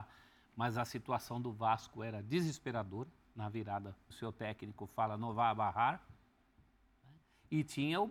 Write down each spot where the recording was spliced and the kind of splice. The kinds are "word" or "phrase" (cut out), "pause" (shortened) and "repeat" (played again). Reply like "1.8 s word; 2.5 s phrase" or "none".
4.1 s phrase